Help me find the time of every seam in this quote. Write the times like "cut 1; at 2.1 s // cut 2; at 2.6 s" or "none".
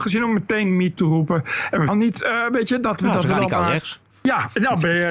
cut 1; at 1.0 s // cut 2; at 1.9 s // cut 3; at 4.1 s